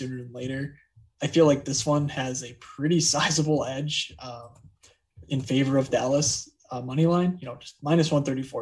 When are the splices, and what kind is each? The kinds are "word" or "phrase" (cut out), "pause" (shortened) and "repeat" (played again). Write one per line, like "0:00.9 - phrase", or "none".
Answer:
none